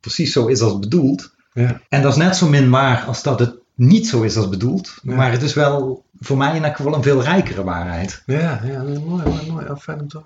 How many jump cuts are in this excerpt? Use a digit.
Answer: 2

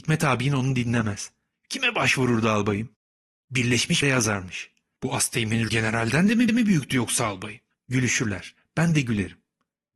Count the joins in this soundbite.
4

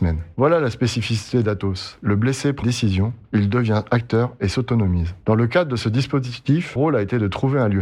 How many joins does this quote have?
2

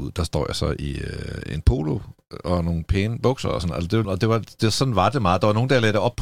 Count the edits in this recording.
1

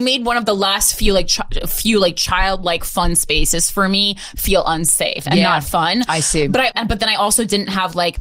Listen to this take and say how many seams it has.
1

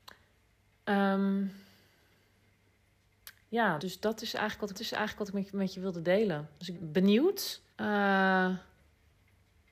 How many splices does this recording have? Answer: 4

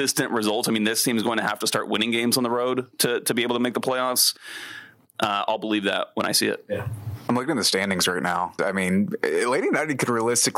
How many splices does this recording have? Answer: 1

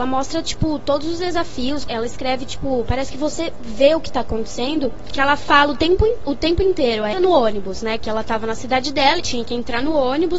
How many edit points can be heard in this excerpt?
3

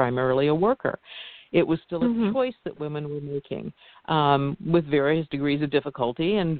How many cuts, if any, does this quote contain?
0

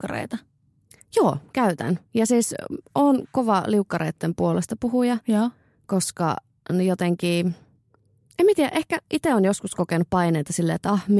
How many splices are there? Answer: 0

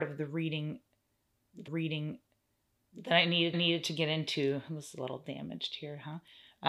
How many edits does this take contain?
2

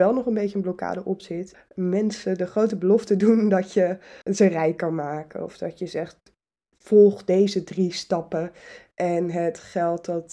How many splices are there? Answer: 2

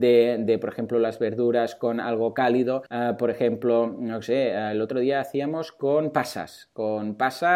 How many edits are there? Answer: 1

